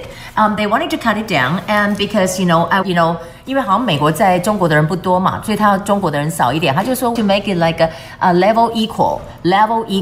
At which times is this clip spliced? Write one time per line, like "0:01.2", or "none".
0:02.8
0:07.2